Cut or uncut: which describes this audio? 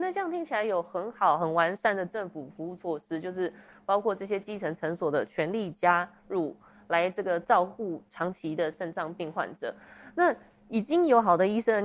uncut